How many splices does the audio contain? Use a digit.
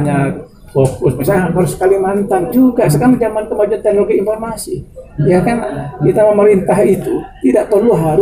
2